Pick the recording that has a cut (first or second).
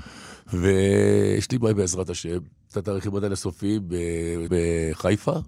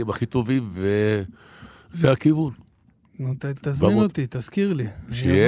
first